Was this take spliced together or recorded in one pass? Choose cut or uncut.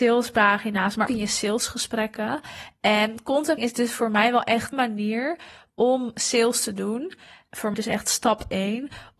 cut